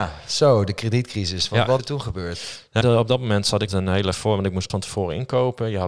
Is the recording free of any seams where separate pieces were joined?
no; 4 cuts; at 1.8 s, 2.8 s, 3.7 s, 4.7 s

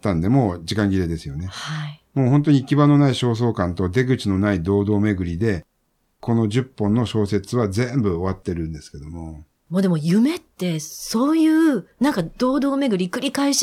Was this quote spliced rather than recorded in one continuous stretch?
no; 0 cuts

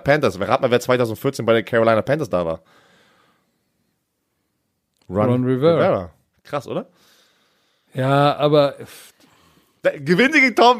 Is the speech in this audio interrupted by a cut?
no; 0 cuts

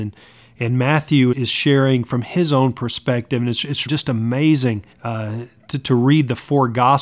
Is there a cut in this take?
yes; 3 cuts; at 1.3 s, 3.9 s, 4.9 s

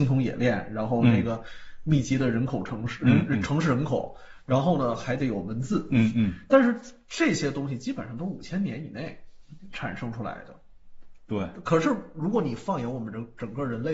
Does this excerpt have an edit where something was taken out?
no; 0 cuts

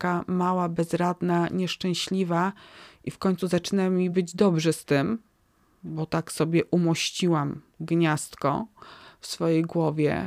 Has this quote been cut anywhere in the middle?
no; 0 cuts

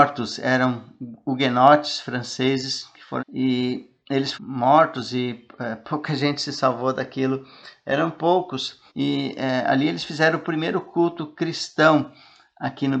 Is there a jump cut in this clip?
yes; 3 cuts; at 3.2 s, 4.3 s, 8.9 s

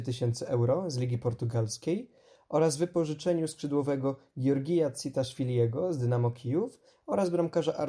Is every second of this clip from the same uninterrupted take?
yes; 0 cuts

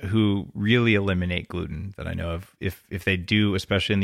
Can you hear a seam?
no; 0 cuts

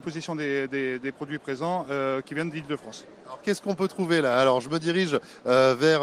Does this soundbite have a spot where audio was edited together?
no; 0 cuts

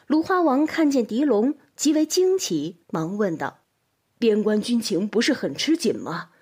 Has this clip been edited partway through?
yes; 2 cuts; at 2.8 s, 3.6 s

